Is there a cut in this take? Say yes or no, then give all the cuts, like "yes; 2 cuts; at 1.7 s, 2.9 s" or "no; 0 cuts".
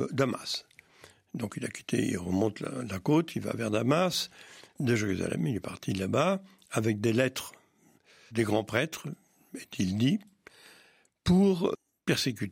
no; 0 cuts